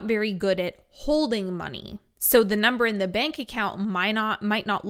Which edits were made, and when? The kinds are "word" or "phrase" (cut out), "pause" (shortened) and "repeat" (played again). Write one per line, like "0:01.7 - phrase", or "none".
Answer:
none